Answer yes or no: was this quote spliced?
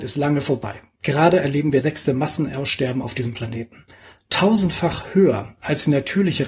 yes